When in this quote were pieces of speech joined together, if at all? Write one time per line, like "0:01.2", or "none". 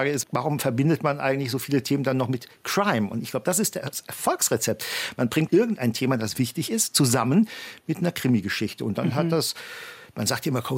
0:05.5